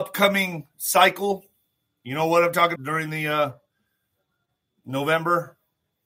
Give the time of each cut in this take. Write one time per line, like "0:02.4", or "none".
0:02.8